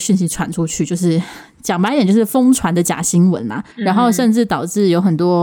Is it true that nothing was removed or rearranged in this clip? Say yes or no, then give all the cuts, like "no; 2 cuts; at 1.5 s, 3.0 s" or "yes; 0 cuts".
no; 1 cut; at 3.7 s